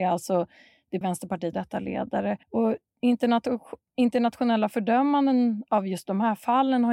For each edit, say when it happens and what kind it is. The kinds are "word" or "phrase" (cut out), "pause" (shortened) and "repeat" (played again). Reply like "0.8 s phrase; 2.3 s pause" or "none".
1.0 s word; 1.5 s phrase; 2.4 s pause